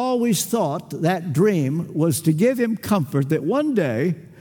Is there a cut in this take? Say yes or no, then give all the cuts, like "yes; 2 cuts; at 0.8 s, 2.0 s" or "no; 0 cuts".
no; 0 cuts